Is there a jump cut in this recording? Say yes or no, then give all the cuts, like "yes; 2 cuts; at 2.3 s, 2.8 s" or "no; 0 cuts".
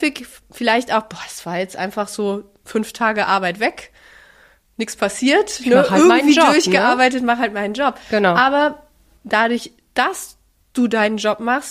no; 0 cuts